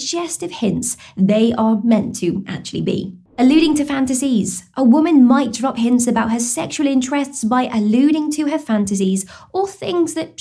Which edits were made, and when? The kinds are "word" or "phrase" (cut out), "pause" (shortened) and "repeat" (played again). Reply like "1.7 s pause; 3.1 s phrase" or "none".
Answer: 3.3 s pause